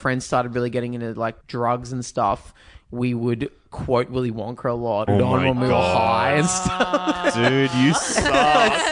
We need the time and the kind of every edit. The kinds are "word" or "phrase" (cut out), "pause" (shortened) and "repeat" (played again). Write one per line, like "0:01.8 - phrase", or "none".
0:01.4 - pause
0:05.1 - phrase